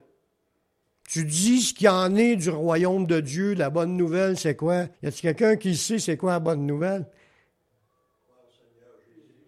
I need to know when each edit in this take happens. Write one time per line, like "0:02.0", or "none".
0:04.9